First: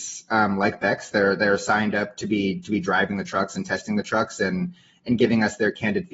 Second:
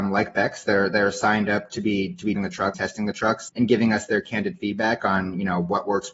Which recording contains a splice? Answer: second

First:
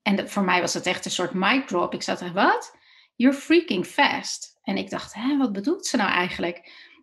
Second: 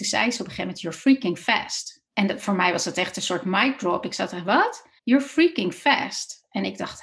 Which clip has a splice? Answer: second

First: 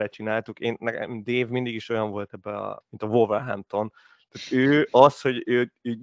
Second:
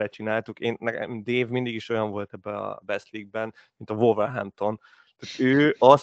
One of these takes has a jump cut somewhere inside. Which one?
first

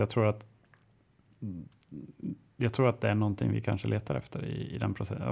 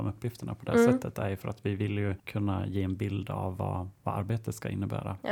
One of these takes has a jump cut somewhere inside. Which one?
second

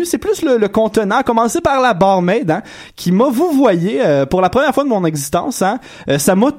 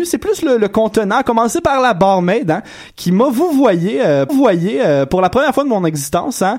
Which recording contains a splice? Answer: second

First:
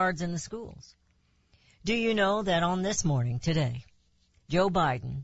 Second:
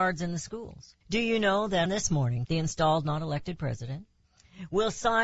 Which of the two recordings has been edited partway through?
second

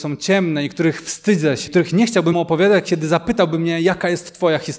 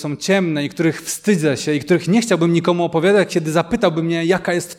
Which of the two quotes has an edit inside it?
first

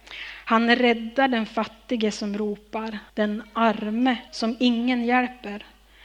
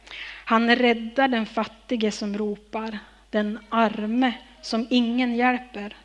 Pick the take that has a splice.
first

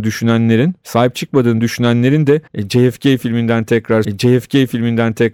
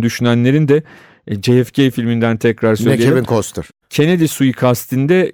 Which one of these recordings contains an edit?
first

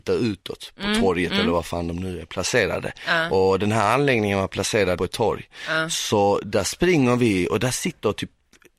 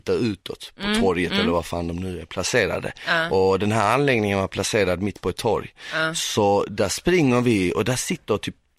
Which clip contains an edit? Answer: first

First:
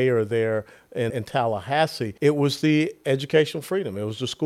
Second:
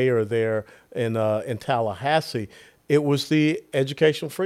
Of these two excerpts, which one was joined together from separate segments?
first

